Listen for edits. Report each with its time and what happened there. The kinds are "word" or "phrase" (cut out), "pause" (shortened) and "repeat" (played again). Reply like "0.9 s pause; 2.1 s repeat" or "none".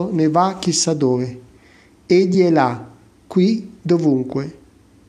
none